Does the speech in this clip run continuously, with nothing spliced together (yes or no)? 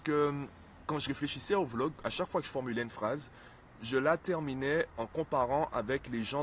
yes